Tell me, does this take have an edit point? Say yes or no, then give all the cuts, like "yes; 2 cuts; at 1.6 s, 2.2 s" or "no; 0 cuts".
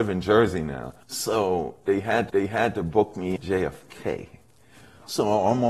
yes; 3 cuts; at 1.0 s, 2.3 s, 3.4 s